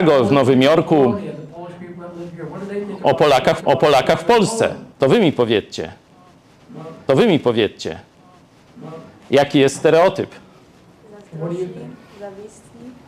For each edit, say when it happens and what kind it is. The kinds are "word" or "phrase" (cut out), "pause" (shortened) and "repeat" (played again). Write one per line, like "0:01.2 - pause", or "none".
0:03.6 - repeat
0:04.9 - pause
0:07.1 - repeat